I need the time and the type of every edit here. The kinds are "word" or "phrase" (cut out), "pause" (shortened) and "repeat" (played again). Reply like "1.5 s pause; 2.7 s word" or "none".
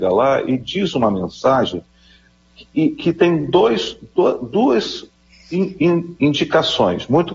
none